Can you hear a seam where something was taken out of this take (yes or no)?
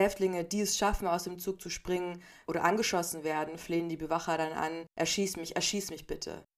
yes